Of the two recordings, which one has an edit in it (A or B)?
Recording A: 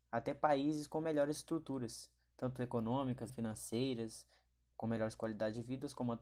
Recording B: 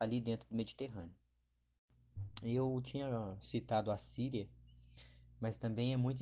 A